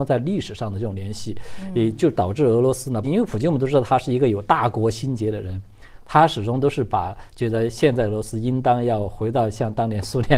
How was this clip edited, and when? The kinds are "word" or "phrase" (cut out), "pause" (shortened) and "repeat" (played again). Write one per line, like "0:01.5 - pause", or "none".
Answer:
0:03.0 - phrase